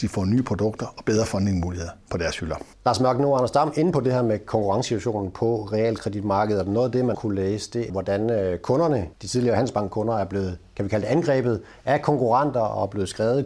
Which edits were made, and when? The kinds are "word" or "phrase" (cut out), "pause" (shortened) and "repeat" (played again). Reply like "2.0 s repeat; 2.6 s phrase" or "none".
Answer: 2.0 s pause; 2.7 s pause; 7.1 s word; 7.9 s word; 9.1 s pause